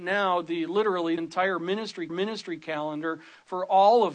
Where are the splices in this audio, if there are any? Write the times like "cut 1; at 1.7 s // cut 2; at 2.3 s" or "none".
cut 1; at 1.2 s // cut 2; at 2.1 s